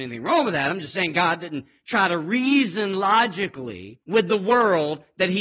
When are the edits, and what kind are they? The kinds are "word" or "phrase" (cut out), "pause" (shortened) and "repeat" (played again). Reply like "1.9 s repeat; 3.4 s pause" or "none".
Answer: 4.0 s pause